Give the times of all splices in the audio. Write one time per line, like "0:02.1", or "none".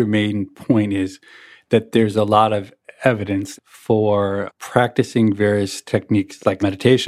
none